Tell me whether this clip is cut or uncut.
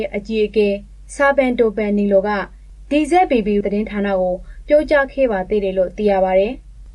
cut